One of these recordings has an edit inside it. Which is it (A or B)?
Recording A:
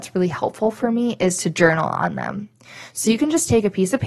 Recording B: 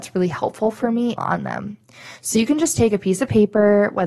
B